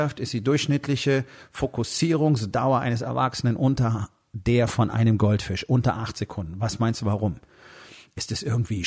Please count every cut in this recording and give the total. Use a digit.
0